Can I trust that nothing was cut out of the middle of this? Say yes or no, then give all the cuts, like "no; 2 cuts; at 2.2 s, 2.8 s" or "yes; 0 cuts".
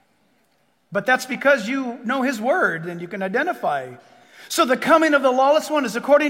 yes; 0 cuts